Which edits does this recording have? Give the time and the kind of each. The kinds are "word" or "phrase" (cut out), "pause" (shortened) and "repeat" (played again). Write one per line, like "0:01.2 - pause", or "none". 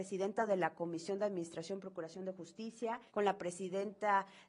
0:03.1 - pause

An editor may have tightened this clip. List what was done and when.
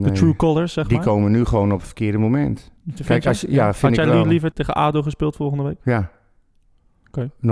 0:02.8 - pause
0:04.5 - word

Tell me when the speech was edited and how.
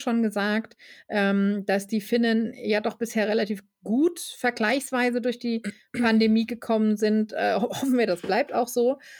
none

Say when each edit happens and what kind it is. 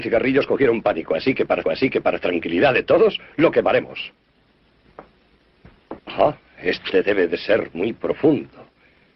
0:01.6 - repeat
0:06.0 - pause

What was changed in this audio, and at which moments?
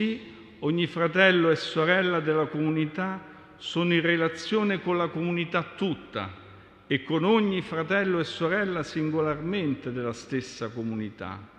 none

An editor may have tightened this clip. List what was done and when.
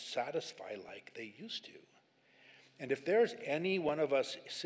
none

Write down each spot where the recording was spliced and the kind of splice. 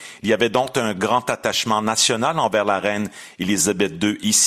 none

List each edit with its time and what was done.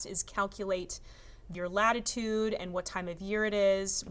0:01.5 - phrase

